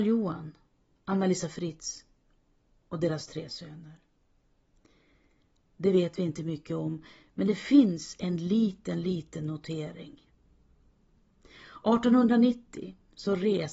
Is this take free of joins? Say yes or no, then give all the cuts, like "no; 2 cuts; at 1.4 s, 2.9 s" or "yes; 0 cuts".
yes; 0 cuts